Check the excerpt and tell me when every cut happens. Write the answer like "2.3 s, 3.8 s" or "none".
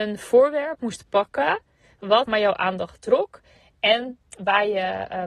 2.3 s